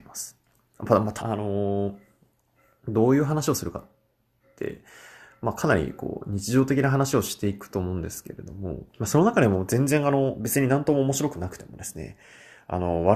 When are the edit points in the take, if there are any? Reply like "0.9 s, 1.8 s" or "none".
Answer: 1.2 s, 8.9 s